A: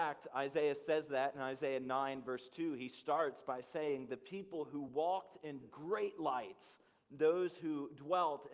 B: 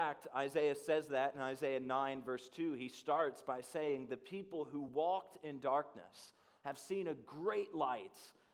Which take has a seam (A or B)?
A